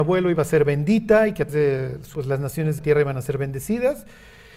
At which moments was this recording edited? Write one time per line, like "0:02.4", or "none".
0:01.5
0:02.1
0:02.8